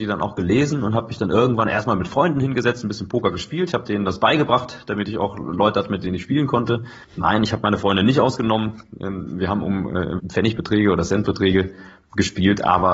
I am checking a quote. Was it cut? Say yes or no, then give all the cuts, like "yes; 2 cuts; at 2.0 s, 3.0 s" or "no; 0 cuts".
yes; 2 cuts; at 7.0 s, 10.2 s